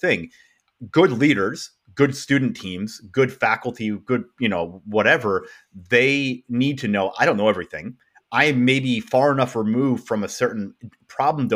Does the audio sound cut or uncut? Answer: uncut